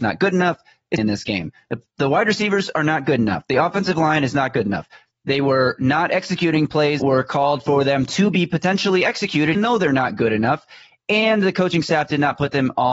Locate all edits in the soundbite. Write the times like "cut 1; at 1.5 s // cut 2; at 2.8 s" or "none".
cut 1; at 1.0 s // cut 2; at 7.0 s // cut 3; at 9.5 s

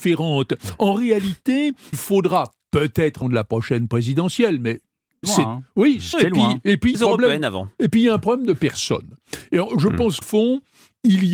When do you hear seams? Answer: cut 1; at 1.9 s // cut 2; at 3.2 s // cut 3; at 5.2 s // cut 4; at 6.1 s // cut 5; at 6.9 s // cut 6; at 10.2 s

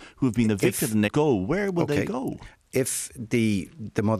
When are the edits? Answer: cut 1; at 1.1 s

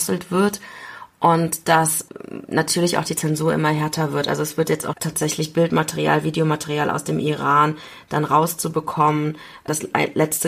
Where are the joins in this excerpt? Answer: cut 1; at 4.9 s

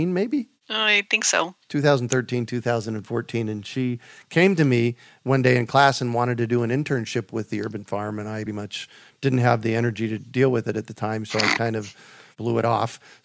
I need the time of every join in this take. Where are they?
cut 1; at 8.5 s

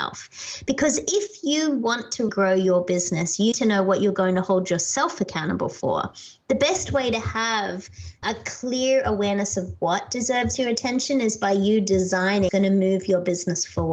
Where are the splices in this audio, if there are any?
cut 1; at 2.3 s // cut 2; at 3.5 s // cut 3; at 8.2 s // cut 4; at 12.5 s

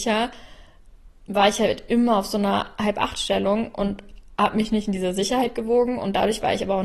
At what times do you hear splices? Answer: none

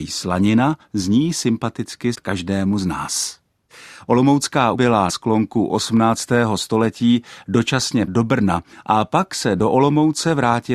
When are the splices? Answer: cut 1; at 2.1 s // cut 2; at 4.7 s // cut 3; at 5.1 s // cut 4; at 8.1 s

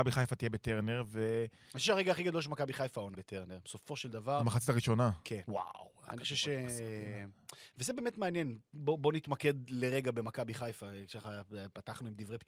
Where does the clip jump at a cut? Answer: cut 1; at 3.1 s

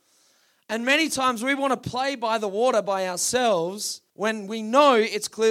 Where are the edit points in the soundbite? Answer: cut 1; at 4.1 s

